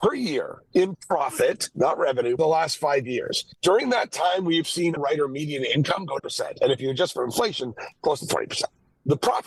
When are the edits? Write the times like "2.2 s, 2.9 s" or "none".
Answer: 0.9 s, 2.4 s, 3.5 s, 5.0 s, 6.2 s